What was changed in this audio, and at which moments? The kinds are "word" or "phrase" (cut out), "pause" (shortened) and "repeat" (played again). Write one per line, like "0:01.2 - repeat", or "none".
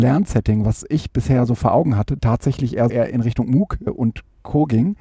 0:02.2 - phrase
0:02.9 - word
0:03.9 - word